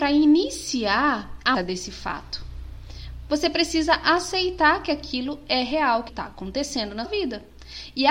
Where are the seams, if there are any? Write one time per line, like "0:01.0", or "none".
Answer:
0:01.5
0:06.1
0:07.0